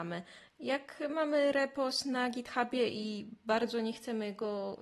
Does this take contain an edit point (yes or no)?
no